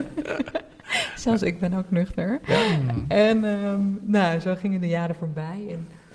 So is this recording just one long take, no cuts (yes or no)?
yes